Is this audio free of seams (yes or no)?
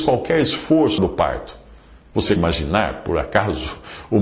no